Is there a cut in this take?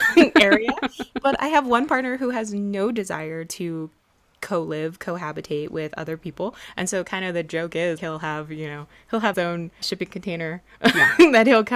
yes; 3 cuts; at 8.0 s, 9.3 s, 9.8 s

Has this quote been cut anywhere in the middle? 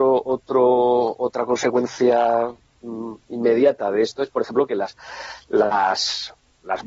no; 0 cuts

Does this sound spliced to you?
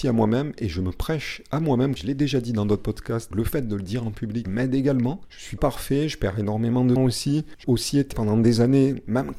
yes; 7 cuts; at 2.0 s, 3.3 s, 4.4 s, 5.6 s, 7.0 s, 7.6 s, 8.1 s

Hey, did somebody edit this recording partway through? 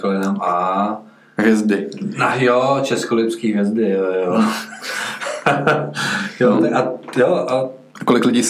no; 0 cuts

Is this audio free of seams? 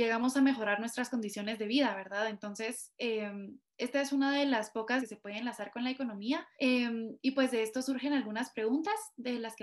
no; 2 cuts; at 5.0 s, 6.6 s

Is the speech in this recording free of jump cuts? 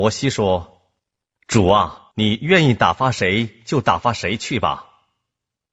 no; 2 cuts; at 1.0 s, 2.1 s

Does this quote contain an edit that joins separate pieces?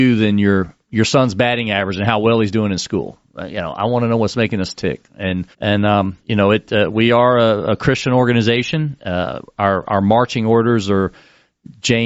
yes; 2 cuts; at 5.5 s, 6.2 s

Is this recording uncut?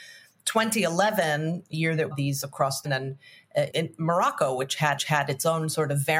no; 6 cuts; at 1.7 s, 2.1 s, 2.4 s, 2.8 s, 3.7 s, 5.0 s

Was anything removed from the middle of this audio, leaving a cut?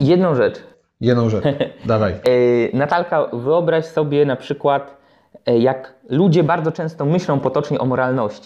no; 0 cuts

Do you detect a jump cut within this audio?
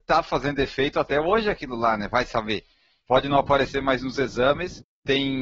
no; 0 cuts

